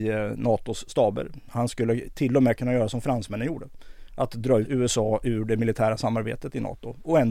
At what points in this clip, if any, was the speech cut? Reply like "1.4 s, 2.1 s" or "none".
4.6 s